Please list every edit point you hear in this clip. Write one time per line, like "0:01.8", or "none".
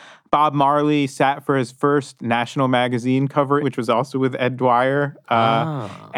0:03.6

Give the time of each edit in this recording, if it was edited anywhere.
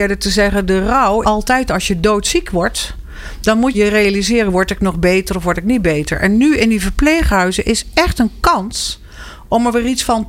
0:01.2
0:03.7

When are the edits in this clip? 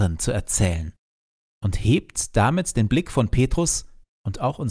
none

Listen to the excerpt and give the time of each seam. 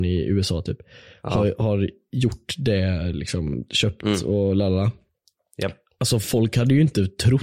none

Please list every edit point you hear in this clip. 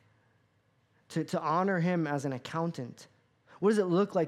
none

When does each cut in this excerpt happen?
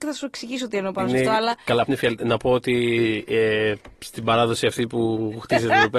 0:01.9
0:03.9

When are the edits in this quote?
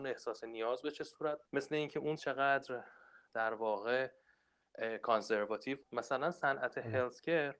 0:01.4
0:02.2
0:05.8

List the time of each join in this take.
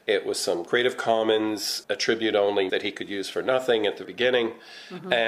0:02.7
0:04.0

